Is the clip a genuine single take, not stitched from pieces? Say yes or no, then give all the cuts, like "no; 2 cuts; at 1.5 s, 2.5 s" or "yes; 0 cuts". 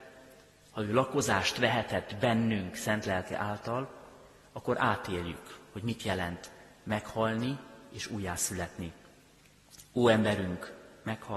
yes; 0 cuts